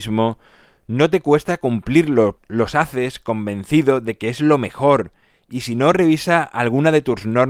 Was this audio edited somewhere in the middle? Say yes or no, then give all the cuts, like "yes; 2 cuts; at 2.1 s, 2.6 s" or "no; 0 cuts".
no; 0 cuts